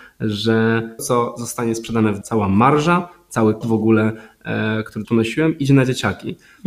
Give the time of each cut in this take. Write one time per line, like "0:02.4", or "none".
0:01.0
0:02.2
0:03.6
0:05.0